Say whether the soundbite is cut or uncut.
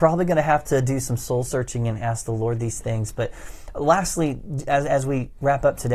uncut